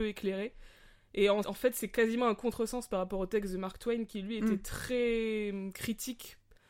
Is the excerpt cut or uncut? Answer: cut